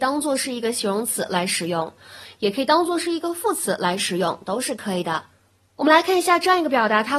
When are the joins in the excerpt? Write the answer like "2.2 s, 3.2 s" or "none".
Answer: none